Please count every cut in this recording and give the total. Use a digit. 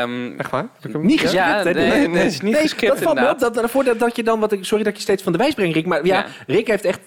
0